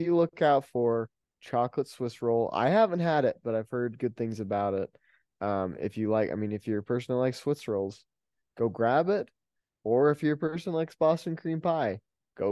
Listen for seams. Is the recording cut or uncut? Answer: uncut